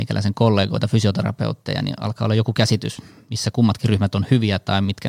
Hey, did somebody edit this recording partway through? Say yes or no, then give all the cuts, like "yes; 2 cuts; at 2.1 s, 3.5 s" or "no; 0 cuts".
no; 0 cuts